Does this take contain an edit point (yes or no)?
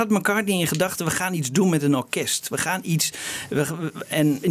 no